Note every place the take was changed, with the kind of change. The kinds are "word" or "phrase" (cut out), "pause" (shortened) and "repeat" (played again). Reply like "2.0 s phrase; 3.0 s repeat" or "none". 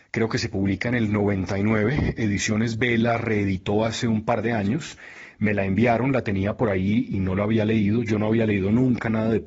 none